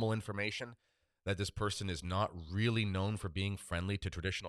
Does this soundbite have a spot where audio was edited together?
no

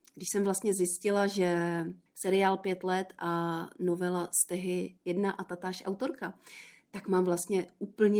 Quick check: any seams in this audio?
yes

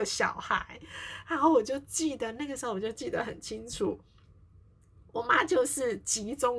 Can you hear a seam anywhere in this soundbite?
no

